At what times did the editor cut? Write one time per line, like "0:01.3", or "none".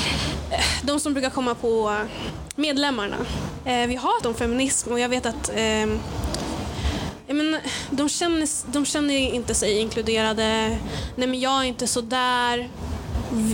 0:04.2